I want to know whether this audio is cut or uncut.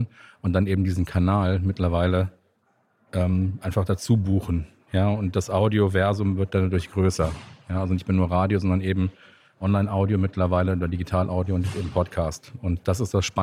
uncut